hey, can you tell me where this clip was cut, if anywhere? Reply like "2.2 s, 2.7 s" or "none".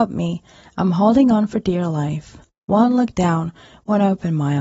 none